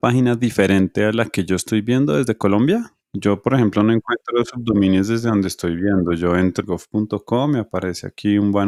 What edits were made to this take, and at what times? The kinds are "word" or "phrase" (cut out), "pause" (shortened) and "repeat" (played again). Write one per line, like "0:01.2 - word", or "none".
0:03.0 - pause
0:06.6 - phrase